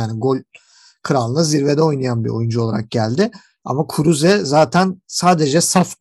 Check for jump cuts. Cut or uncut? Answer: uncut